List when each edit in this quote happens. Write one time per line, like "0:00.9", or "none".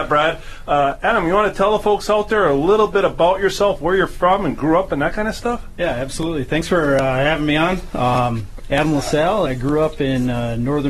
0:09.5